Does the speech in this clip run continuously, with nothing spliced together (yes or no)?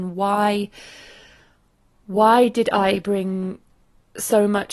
yes